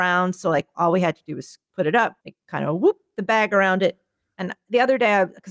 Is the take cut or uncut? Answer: cut